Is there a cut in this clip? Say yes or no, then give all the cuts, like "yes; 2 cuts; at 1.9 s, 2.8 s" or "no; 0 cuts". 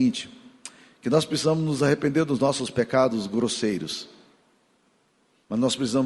no; 0 cuts